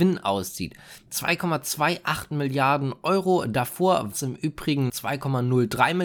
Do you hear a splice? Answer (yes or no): yes